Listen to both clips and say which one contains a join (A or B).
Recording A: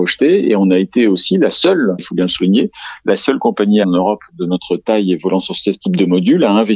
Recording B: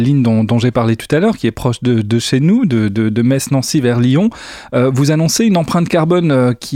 A